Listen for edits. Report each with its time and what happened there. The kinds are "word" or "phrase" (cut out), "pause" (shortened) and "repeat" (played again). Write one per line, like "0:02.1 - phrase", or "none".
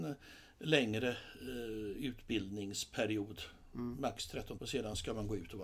0:04.6 - word